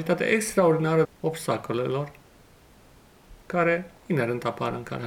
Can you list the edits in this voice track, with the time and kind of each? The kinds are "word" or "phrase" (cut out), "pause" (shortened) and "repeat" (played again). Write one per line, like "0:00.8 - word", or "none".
0:01.0 - phrase